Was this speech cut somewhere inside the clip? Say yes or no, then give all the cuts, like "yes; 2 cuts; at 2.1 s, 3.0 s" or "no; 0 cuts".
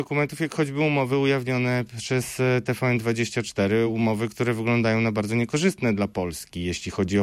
no; 0 cuts